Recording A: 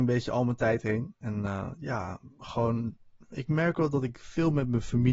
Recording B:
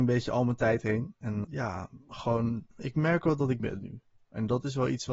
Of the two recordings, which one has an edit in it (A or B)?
B